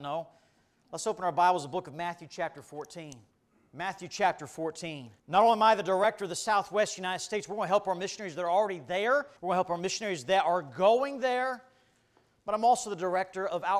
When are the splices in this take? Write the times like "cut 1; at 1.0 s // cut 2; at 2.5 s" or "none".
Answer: cut 1; at 3.3 s // cut 2; at 5.2 s // cut 3; at 9.4 s